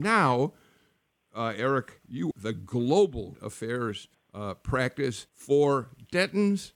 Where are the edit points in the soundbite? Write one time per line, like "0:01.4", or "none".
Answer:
0:02.3
0:03.3
0:04.1
0:05.3